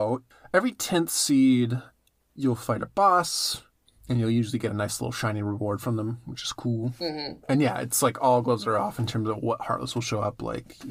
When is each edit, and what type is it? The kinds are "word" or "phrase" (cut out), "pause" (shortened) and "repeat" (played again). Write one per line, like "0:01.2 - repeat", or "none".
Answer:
none